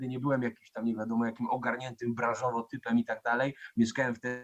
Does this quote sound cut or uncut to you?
uncut